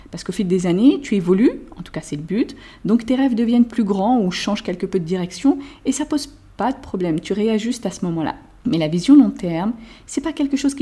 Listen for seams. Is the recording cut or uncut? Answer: uncut